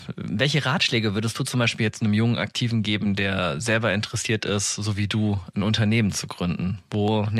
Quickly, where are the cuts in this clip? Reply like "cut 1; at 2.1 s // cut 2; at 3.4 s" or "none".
none